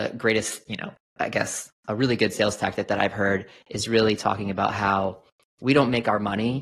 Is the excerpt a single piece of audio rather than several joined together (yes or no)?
yes